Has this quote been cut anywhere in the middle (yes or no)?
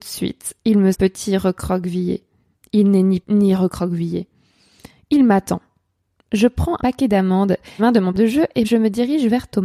yes